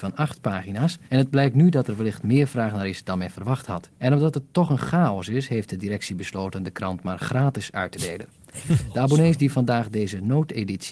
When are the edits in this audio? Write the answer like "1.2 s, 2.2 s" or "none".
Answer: 1.0 s, 3.9 s